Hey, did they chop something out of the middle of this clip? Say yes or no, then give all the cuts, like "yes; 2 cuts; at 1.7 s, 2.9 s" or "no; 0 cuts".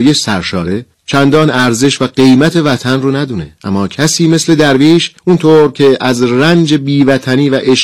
yes; 3 cuts; at 0.9 s, 3.6 s, 5.2 s